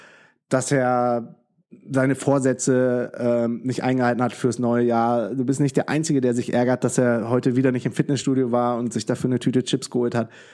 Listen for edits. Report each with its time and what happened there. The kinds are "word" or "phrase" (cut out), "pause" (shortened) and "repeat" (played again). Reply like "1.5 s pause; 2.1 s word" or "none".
none